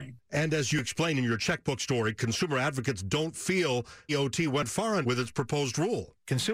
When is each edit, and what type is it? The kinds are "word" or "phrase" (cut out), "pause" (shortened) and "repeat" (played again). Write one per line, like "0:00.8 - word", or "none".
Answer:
0:04.1 - word
0:05.0 - word